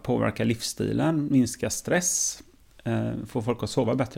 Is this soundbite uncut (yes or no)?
yes